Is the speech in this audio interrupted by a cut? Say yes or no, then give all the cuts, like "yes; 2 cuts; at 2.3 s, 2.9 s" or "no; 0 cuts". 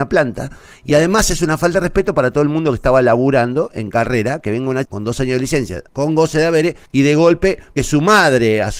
yes; 4 cuts; at 4.9 s, 5.9 s, 6.9 s, 7.8 s